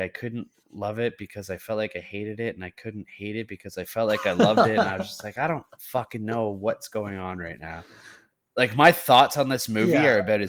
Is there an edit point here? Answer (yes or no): no